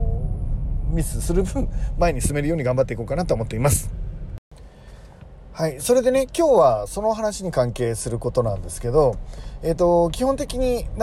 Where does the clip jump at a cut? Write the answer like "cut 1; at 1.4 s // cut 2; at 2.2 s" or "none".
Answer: none